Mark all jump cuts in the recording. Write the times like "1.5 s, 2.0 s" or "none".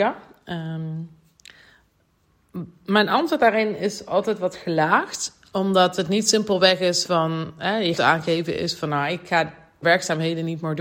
5.5 s, 7.0 s, 8.0 s, 9.8 s